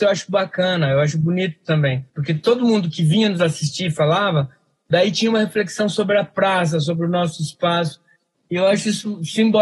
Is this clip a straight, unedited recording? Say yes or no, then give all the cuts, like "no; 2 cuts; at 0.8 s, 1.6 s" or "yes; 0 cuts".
no; 1 cut; at 2.1 s